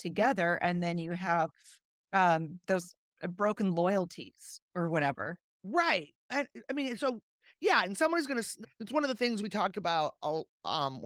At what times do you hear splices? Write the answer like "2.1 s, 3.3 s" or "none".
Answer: 6.3 s, 8.6 s